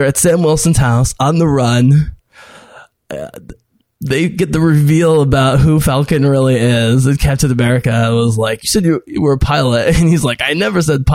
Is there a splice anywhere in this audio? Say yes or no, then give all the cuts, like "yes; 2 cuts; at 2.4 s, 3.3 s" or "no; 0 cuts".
no; 0 cuts